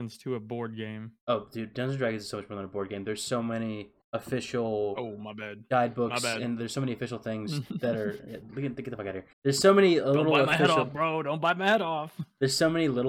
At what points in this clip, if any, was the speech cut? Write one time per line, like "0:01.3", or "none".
0:01.2
0:04.0
0:09.3